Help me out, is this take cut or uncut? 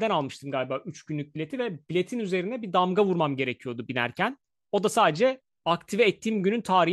uncut